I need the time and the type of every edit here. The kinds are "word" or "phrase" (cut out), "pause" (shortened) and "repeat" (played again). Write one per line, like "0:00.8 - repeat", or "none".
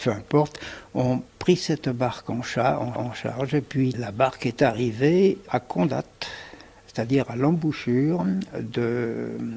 0:01.3 - pause
0:03.0 - repeat
0:05.5 - word